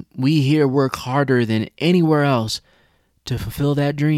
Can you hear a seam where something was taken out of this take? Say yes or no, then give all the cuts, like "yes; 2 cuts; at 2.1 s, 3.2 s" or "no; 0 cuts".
no; 0 cuts